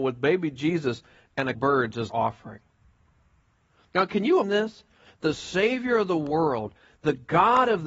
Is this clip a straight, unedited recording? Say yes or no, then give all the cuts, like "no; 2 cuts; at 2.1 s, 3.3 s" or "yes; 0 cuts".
no; 3 cuts; at 1.5 s, 2.1 s, 4.4 s